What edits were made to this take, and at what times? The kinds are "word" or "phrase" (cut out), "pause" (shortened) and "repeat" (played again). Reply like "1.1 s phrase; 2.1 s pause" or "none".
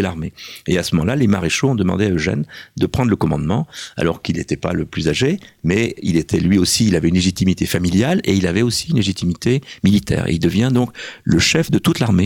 none